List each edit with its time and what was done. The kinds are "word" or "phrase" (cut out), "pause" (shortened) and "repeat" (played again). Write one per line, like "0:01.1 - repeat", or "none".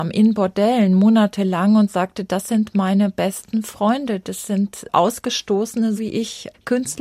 0:06.0 - word